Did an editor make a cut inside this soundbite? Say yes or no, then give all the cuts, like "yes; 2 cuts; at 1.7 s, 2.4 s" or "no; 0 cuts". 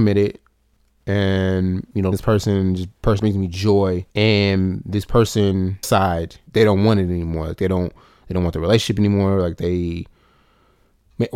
yes; 5 cuts; at 2.1 s, 3.2 s, 4.1 s, 5.8 s, 6.5 s